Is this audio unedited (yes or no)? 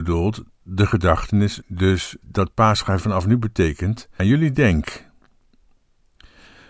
no